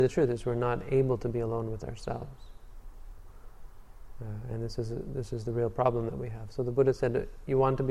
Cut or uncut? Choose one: uncut